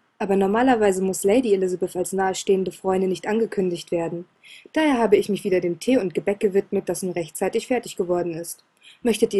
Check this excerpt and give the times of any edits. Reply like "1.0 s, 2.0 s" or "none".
none